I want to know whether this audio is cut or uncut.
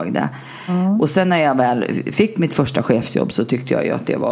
uncut